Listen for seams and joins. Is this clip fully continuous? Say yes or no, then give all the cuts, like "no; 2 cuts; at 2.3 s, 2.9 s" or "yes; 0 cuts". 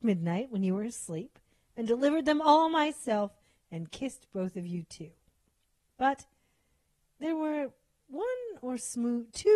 yes; 0 cuts